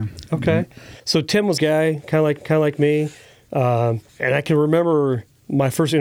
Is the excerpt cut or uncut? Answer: cut